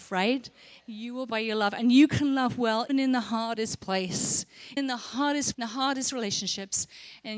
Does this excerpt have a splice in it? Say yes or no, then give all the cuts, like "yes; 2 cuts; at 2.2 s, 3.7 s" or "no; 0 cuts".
yes; 4 cuts; at 1.3 s, 2.9 s, 4.8 s, 5.5 s